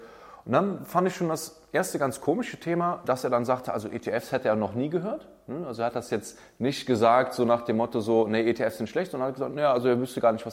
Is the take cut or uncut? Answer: uncut